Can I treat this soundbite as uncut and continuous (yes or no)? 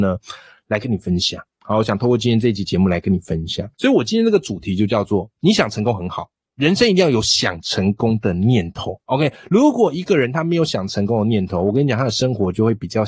no